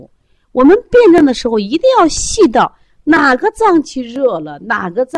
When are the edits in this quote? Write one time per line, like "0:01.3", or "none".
none